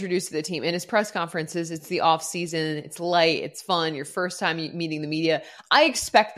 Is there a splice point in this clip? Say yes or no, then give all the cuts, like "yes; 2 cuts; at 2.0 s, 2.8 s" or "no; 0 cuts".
no; 0 cuts